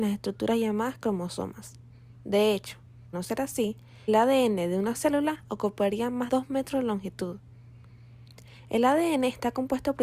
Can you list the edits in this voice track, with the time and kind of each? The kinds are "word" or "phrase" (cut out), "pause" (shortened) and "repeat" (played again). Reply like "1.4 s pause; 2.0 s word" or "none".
3.1 s word; 4.1 s word; 4.9 s word; 6.3 s word